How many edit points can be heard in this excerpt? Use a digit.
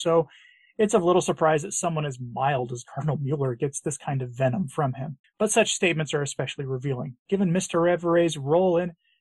1